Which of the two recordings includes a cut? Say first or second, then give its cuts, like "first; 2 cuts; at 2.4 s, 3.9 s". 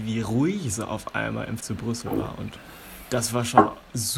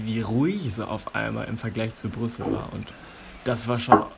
first; 1 cut; at 1.6 s